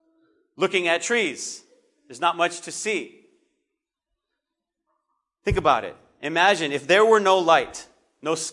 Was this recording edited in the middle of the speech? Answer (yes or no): no